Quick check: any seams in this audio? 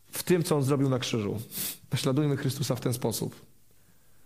yes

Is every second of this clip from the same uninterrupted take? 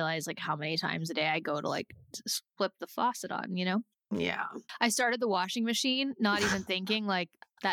yes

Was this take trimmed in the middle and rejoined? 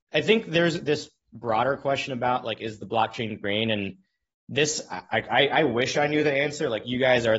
no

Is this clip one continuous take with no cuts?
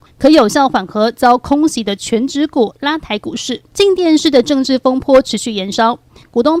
no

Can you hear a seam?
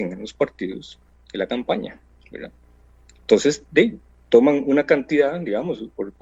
yes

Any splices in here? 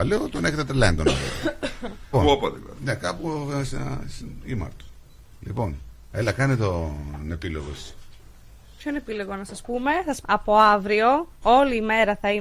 yes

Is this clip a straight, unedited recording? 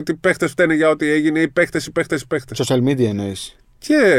yes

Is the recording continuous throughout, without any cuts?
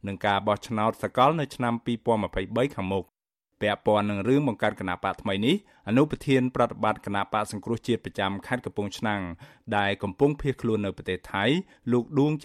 yes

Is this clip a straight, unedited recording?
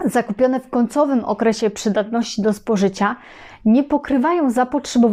yes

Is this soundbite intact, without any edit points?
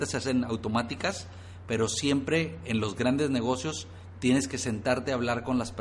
yes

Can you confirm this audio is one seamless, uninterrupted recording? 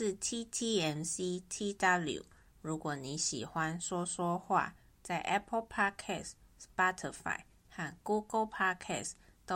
yes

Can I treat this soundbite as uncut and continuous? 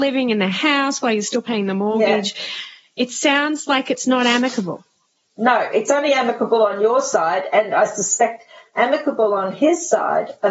yes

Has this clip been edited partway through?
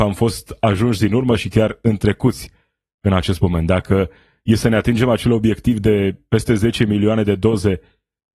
no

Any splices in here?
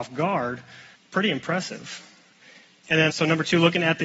yes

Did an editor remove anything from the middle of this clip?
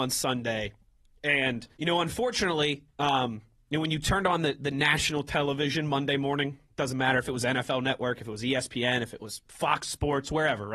yes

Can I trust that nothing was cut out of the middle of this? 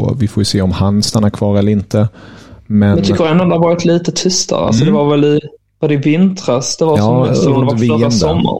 yes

